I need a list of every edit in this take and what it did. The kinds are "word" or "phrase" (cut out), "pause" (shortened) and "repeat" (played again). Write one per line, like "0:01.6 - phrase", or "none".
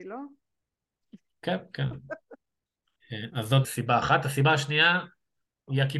0:03.6 - word